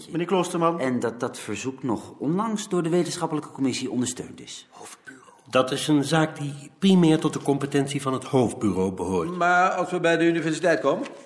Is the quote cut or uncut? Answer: uncut